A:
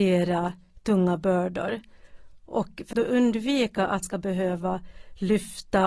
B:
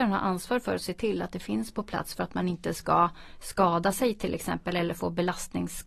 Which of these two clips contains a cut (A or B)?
A